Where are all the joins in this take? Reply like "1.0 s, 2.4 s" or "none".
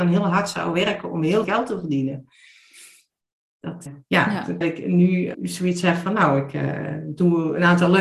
1.4 s, 3.9 s, 4.6 s, 5.3 s

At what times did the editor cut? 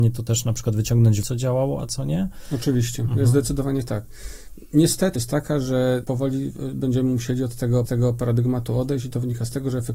1.2 s, 5.2 s, 7.9 s

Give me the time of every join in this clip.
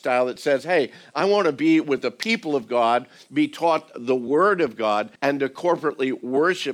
5.1 s

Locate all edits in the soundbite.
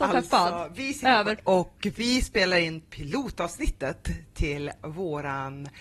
1.4 s

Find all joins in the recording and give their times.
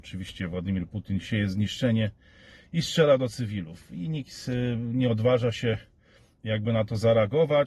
none

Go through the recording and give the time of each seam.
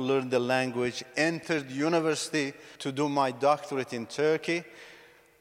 2.8 s

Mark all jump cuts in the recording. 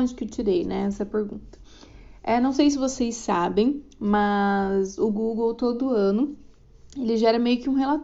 none

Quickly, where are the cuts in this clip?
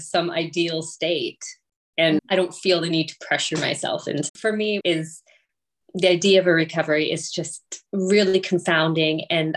2.2 s, 4.3 s, 4.8 s

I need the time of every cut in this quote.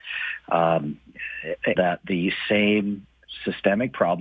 1.8 s

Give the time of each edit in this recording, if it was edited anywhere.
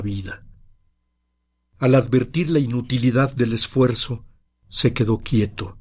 none

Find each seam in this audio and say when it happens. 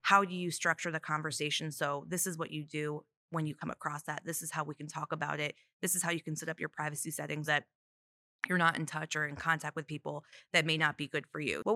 7.5 s

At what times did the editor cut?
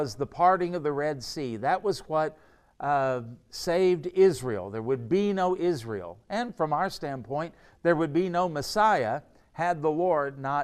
none

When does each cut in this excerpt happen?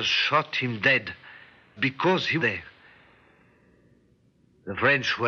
1.8 s, 2.4 s

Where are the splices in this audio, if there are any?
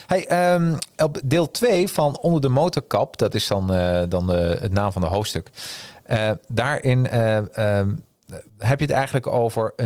8.5 s

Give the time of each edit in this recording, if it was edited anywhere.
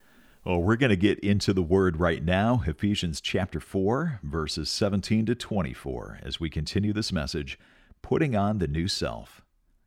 none

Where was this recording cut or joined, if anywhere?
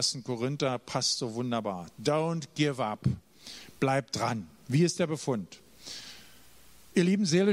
none

